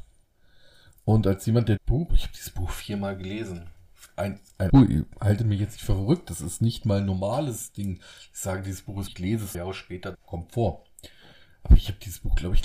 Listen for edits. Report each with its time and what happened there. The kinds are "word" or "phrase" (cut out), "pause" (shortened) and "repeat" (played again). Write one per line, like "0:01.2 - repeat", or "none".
0:01.8 - word
0:02.1 - phrase
0:04.7 - word
0:09.1 - word
0:09.5 - phrase
0:10.1 - word